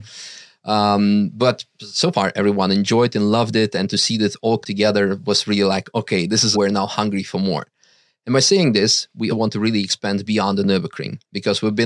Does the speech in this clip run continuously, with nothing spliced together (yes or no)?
no